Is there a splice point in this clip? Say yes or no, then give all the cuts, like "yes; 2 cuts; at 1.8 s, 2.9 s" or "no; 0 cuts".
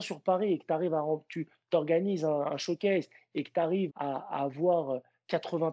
yes; 1 cut; at 3.9 s